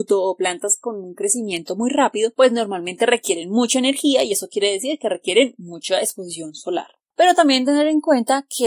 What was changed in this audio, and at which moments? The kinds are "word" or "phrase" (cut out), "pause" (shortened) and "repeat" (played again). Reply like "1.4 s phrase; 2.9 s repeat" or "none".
none